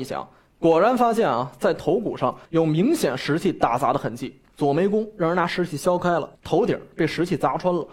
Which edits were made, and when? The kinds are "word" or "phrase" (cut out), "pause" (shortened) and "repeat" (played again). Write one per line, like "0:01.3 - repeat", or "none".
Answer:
0:02.5 - pause
0:04.5 - pause
0:06.3 - pause